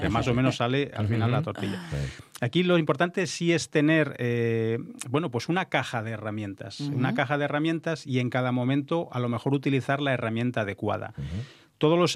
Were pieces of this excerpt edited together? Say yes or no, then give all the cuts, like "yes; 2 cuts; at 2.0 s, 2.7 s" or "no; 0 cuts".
no; 0 cuts